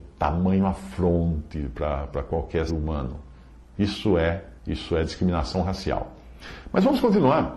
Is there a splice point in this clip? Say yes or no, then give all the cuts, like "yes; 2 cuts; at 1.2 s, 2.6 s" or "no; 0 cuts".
yes; 2 cuts; at 2.7 s, 4.6 s